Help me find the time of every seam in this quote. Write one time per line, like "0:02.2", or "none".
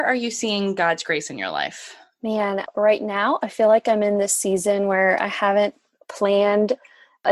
none